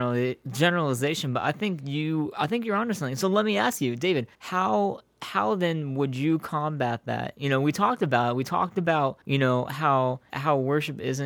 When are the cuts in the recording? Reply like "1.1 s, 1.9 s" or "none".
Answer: 4.3 s, 9.2 s, 10.3 s